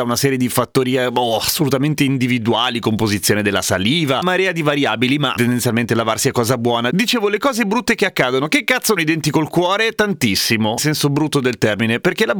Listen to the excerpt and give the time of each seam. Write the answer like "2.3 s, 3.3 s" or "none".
4.2 s, 5.4 s, 9.0 s, 10.8 s